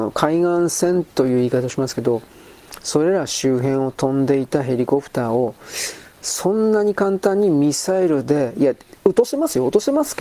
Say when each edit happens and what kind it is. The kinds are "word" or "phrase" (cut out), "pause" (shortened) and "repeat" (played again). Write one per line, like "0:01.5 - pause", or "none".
0:01.1 - pause